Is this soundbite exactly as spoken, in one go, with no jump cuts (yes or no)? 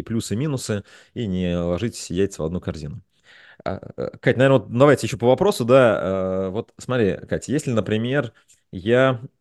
yes